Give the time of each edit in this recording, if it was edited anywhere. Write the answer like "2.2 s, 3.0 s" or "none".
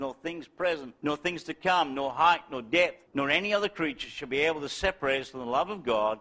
1.0 s, 3.0 s